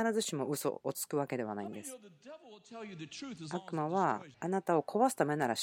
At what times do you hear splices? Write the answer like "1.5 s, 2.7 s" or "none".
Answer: 4.3 s